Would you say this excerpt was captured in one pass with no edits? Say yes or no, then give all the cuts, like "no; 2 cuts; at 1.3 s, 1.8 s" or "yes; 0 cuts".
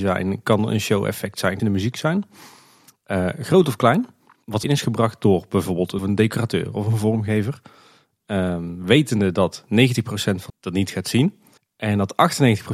no; 5 cuts; at 1.6 s, 4.6 s, 6.0 s, 10.5 s, 11.6 s